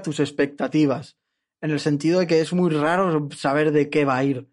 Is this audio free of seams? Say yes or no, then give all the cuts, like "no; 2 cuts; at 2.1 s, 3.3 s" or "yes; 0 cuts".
yes; 0 cuts